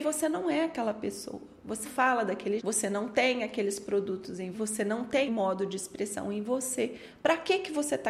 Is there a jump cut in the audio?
yes; 4 cuts; at 1.8 s, 2.6 s, 4.5 s, 5.3 s

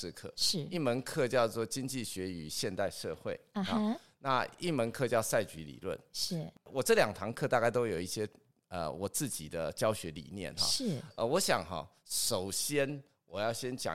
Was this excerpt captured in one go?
yes; 0 cuts

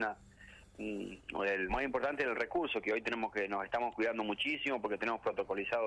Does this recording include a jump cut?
yes; 1 cut; at 1.7 s

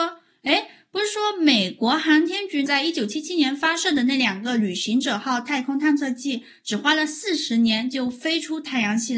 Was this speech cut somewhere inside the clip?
yes; 1 cut; at 2.7 s

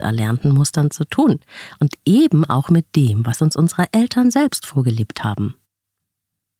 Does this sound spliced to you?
no; 0 cuts

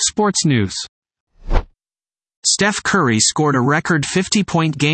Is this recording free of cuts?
yes; 0 cuts

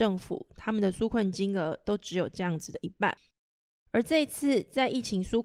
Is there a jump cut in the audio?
no; 0 cuts

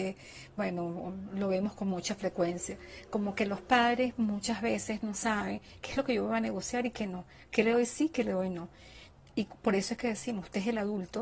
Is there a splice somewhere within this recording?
no; 0 cuts

